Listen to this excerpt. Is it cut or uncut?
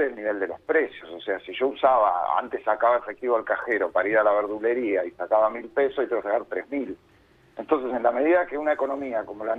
uncut